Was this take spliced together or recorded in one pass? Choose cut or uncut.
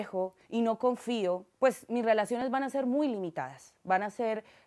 cut